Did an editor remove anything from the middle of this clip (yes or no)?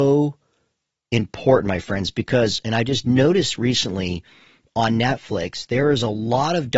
no